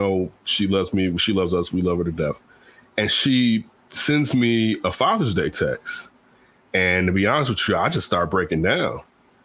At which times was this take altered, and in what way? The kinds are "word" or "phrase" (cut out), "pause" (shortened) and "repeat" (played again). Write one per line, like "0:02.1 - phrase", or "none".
none

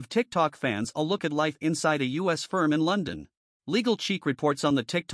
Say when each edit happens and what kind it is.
0:03.4 - pause

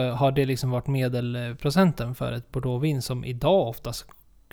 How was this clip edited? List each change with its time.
none

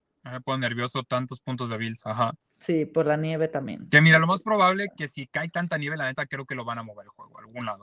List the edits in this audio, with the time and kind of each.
0:02.4 - pause

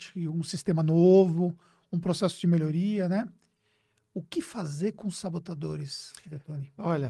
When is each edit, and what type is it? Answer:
none

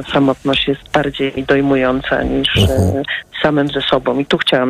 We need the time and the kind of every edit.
0:01.4 - word

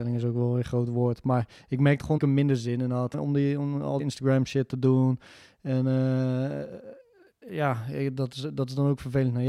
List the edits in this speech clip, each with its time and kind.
0:02.2 - word
0:03.1 - phrase
0:04.0 - word
0:07.5 - word

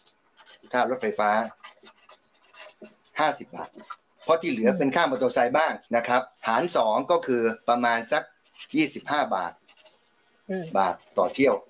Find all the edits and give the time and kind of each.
0:05.9 - pause
0:06.4 - pause

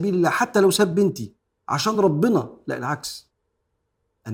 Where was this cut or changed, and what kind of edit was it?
none

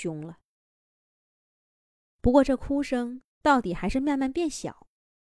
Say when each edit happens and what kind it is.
0:03.3 - pause

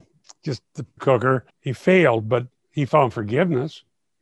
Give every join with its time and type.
0:01.0 - word
0:01.5 - pause

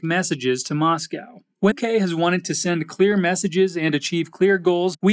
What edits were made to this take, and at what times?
0:01.7 - word

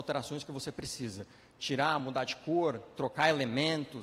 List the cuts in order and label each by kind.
none

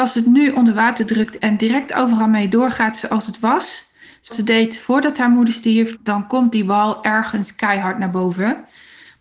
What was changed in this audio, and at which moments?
0:01.4 - word
0:04.3 - word
0:05.9 - word

